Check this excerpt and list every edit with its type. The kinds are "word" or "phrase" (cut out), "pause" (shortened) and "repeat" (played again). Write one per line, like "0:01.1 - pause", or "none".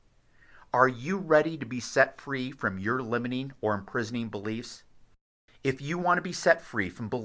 none